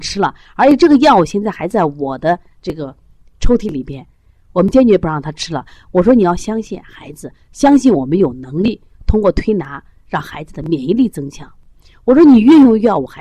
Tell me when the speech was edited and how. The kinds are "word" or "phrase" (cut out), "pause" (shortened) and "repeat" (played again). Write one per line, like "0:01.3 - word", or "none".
none

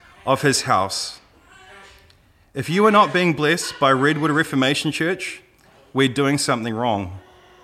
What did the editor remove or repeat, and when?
none

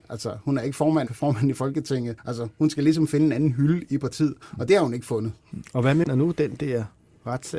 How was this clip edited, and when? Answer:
0:01.1 - phrase
0:02.2 - pause
0:06.0 - word

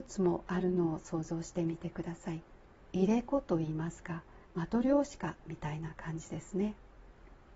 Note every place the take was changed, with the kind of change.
0:02.8 - pause
0:04.4 - pause

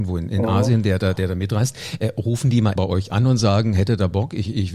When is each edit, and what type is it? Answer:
0:02.8 - word

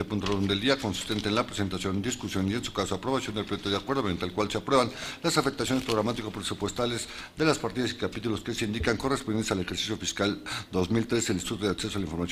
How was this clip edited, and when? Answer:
none

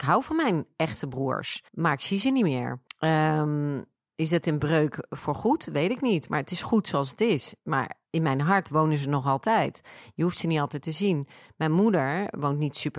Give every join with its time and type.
0:01.7 - pause
0:02.9 - pause
0:08.1 - pause

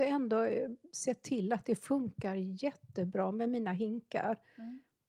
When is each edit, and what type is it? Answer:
none

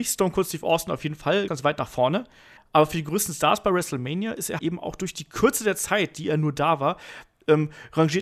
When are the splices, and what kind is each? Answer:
0:01.5 - word
0:02.6 - pause
0:04.6 - word

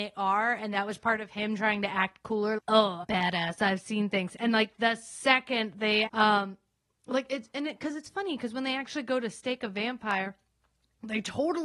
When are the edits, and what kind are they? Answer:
0:02.6 - word
0:03.0 - phrase
0:06.1 - word

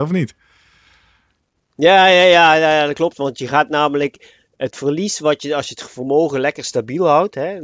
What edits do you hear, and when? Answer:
none

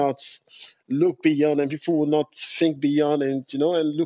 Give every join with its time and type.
none

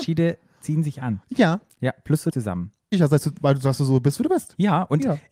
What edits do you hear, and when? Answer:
0:02.3 - phrase
0:02.9 - phrase

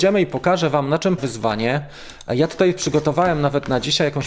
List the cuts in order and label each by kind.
0:01.2 - word

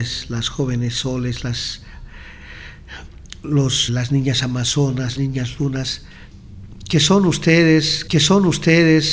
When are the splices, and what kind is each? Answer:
0:03.9 - word
0:05.2 - word
0:08.1 - repeat

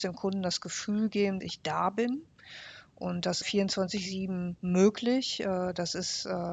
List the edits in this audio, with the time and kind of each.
0:01.4 - word
0:03.4 - phrase
0:04.6 - pause

